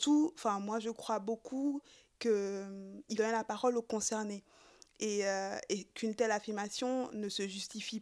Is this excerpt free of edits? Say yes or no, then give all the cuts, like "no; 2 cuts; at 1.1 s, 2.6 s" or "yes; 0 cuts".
no; 1 cut; at 3.2 s